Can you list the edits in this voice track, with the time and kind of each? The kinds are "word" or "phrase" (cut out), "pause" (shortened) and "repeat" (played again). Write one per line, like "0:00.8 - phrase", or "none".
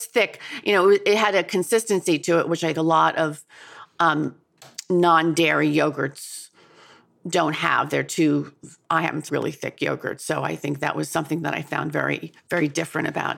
0:02.7 - word
0:09.3 - word
0:12.4 - pause